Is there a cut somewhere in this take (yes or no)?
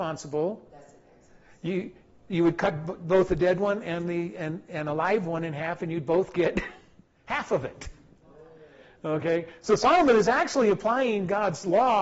no